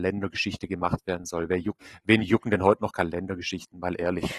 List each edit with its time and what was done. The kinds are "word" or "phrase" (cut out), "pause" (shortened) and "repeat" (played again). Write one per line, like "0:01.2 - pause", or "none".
0:01.8 - word